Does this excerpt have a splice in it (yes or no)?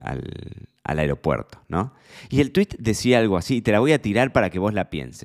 no